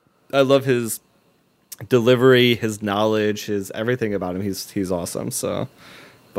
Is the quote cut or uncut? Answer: uncut